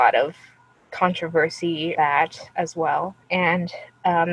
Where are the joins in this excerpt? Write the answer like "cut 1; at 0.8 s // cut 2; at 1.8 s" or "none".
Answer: cut 1; at 1.9 s // cut 2; at 3.2 s